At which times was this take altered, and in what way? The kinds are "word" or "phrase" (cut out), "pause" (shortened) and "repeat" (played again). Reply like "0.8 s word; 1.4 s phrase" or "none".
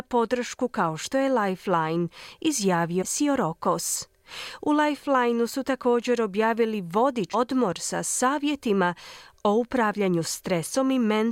3.0 s word; 7.3 s word